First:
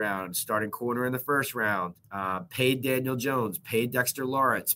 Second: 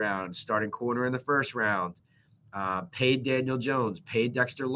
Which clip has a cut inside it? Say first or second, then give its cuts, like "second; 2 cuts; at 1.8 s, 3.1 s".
first; 1 cut; at 2.0 s